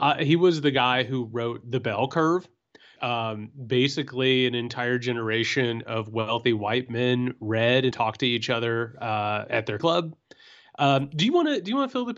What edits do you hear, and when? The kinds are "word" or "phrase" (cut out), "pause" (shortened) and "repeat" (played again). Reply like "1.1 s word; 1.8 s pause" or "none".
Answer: 3.0 s word; 7.9 s word; 9.5 s word; 9.8 s word